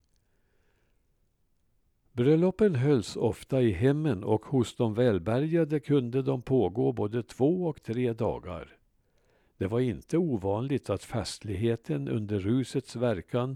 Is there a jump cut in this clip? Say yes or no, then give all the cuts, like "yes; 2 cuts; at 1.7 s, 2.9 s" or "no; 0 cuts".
no; 0 cuts